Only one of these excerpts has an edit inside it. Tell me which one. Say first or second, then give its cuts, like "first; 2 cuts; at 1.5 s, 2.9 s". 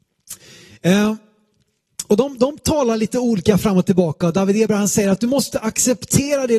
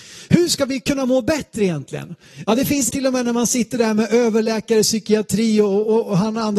second; 1 cut; at 2.9 s